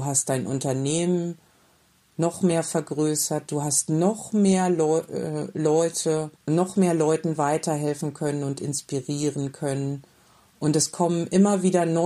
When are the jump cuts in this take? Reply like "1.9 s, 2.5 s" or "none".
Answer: 6.4 s